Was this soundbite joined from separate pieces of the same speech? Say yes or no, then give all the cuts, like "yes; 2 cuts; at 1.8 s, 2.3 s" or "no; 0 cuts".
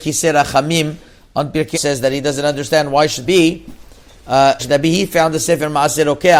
yes; 3 cuts; at 1.7 s, 3.2 s, 4.6 s